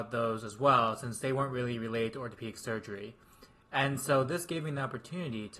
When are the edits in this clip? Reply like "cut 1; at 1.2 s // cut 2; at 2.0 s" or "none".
none